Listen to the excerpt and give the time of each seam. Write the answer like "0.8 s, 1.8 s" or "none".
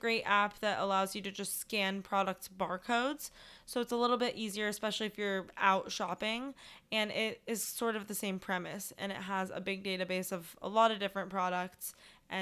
none